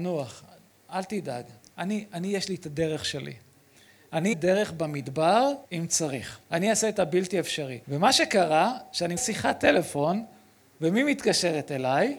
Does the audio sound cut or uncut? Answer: cut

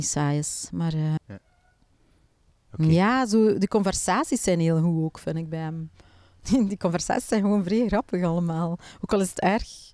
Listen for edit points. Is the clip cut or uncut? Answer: cut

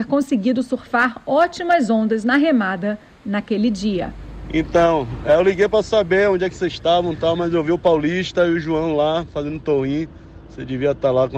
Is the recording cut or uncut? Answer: uncut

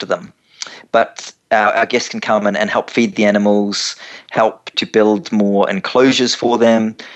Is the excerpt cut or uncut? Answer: cut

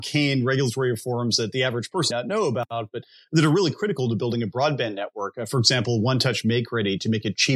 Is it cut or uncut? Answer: cut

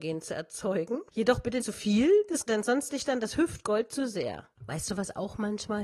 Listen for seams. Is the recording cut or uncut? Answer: cut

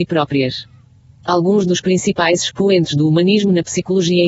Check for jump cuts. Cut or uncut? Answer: uncut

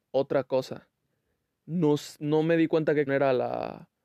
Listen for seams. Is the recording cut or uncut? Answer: cut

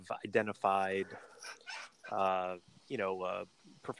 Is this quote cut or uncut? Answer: uncut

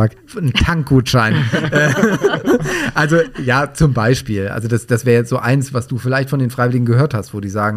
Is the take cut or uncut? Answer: uncut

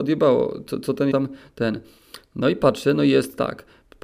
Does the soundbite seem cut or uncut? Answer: cut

